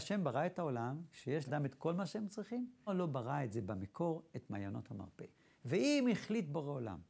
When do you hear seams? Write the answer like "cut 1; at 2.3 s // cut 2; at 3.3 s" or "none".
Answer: cut 1; at 1.5 s // cut 2; at 2.9 s // cut 3; at 5.3 s